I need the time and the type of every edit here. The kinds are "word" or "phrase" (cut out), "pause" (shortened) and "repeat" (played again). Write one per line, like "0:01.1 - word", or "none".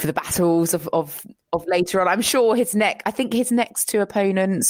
none